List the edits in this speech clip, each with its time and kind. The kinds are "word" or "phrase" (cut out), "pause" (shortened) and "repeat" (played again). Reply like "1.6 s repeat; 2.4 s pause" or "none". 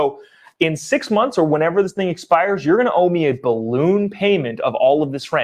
none